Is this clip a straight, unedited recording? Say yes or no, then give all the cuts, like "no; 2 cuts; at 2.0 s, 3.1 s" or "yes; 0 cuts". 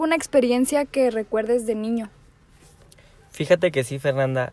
yes; 0 cuts